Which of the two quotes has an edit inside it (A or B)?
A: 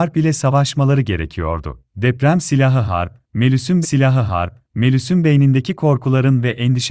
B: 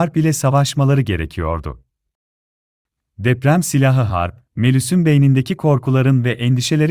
A